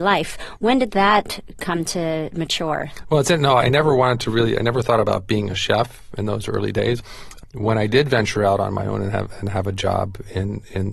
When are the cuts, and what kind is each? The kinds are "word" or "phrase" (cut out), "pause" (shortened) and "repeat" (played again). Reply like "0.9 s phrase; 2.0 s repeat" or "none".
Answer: 3.6 s word